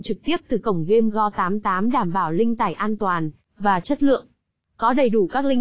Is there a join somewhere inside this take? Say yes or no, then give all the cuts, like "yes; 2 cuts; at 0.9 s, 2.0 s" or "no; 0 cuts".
no; 0 cuts